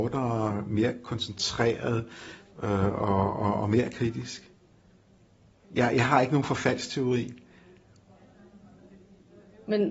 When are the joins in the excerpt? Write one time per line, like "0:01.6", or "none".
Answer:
none